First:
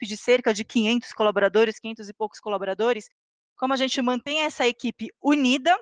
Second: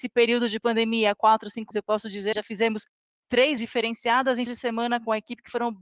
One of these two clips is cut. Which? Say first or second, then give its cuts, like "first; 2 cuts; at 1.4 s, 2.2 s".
second; 4 cuts; at 1.7 s, 2.3 s, 3.6 s, 4.5 s